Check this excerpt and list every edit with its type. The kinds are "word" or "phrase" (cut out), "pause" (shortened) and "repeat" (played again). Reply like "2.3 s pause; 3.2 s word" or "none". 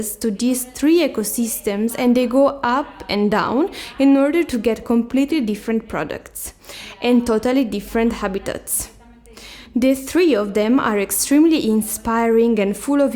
none